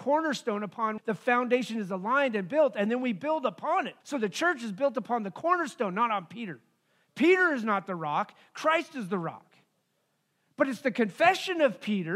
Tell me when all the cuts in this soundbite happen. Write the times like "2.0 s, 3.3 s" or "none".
1.0 s, 4.0 s